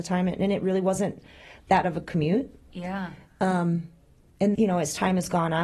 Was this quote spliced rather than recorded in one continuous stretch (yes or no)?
yes